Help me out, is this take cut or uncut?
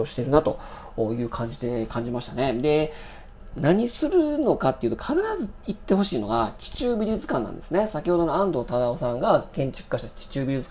cut